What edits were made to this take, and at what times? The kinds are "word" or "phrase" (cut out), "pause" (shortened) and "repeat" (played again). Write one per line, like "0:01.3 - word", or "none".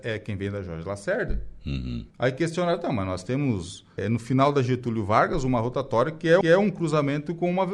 0:02.1 - pause
0:04.0 - word
0:06.4 - repeat